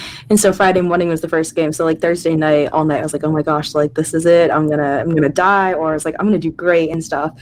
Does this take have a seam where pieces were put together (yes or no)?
no